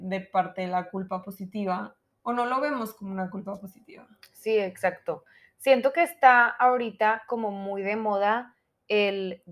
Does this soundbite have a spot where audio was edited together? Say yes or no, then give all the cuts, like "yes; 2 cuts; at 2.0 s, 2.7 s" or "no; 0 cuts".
no; 0 cuts